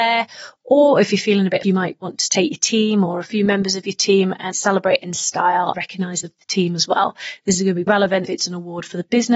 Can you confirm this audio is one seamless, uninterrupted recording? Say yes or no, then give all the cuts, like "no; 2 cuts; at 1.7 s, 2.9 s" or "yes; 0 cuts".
no; 6 cuts; at 1.6 s, 4.5 s, 5.7 s, 6.2 s, 7.9 s, 8.3 s